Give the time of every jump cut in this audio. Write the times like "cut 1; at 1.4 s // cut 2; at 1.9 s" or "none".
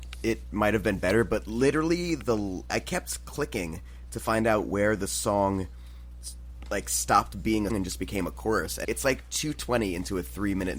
cut 1; at 2.7 s // cut 2; at 7.7 s // cut 3; at 8.8 s